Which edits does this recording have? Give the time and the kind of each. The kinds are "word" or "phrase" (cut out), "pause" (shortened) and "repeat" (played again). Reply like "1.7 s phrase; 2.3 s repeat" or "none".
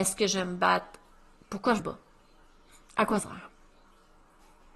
1.8 s word; 3.2 s word

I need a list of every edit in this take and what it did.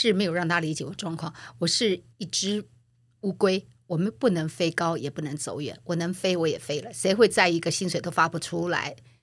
2.1 s pause

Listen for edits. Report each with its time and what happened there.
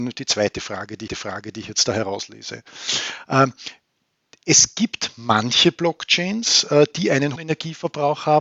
1.1 s repeat; 7.4 s word

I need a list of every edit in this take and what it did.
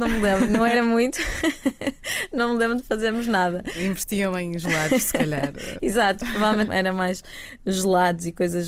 6.7 s word

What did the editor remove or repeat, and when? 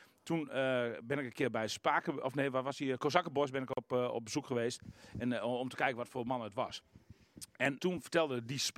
7.8 s word

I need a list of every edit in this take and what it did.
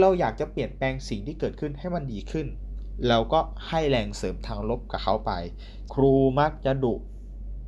5.9 s phrase

